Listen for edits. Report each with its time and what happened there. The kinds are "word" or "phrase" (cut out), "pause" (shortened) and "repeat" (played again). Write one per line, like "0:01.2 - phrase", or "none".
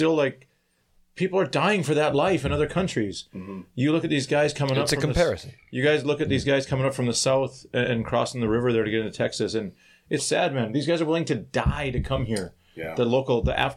0:10.2 - word